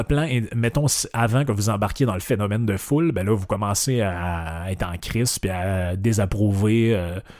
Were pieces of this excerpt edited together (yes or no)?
no